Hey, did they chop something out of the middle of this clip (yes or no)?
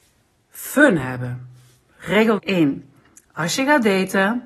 yes